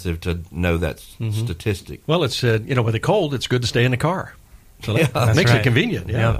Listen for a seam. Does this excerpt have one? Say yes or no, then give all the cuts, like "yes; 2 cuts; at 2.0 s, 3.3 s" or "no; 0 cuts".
no; 0 cuts